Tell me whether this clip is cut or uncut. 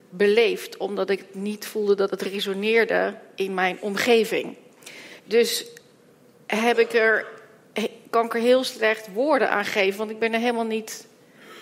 uncut